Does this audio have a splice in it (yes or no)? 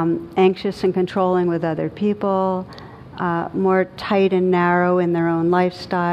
no